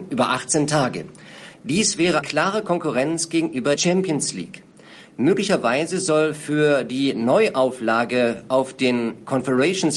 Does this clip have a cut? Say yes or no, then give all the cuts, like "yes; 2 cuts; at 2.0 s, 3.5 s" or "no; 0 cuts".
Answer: yes; 2 cuts; at 2.2 s, 3.8 s